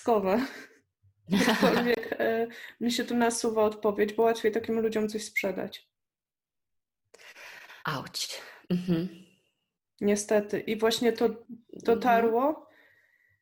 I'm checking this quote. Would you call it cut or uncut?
cut